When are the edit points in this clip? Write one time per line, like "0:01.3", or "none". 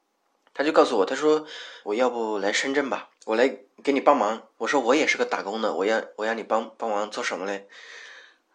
0:01.8
0:03.2
0:04.5